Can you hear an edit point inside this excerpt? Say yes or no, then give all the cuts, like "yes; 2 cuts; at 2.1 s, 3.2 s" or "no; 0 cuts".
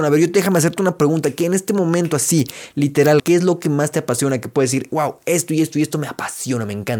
yes; 1 cut; at 3.2 s